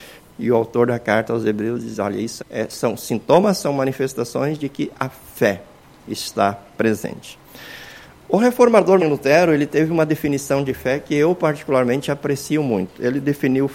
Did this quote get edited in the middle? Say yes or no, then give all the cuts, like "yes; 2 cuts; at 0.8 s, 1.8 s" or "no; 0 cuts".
yes; 2 cuts; at 2.4 s, 9.0 s